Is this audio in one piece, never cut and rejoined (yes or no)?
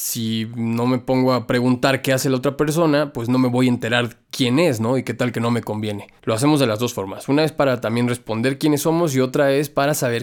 no